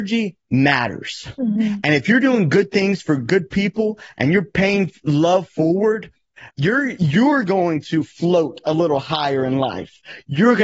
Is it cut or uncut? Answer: cut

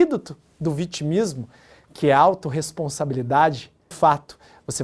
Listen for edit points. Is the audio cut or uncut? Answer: cut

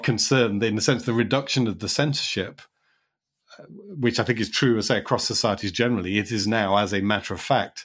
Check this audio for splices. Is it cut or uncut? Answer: uncut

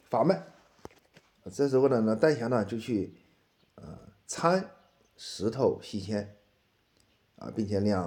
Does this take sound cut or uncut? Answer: uncut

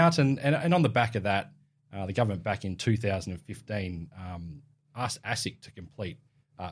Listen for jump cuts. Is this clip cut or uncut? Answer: uncut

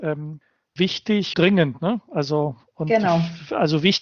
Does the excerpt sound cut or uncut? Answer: cut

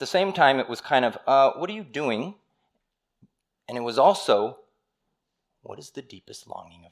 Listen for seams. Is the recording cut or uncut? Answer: uncut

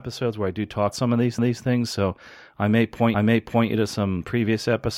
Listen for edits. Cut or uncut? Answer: cut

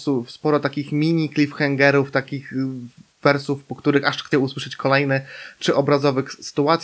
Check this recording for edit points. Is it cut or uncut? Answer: cut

